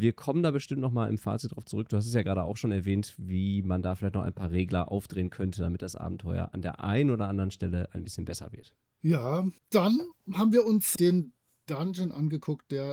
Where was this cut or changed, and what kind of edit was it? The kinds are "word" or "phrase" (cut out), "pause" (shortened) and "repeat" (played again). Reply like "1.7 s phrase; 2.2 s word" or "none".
9.6 s pause

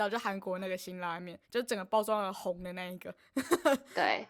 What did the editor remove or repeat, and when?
1.4 s pause

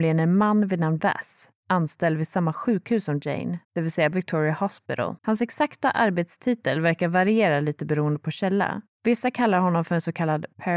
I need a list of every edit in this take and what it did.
1.0 s word; 3.6 s pause; 4.1 s word; 5.2 s pause; 8.9 s pause

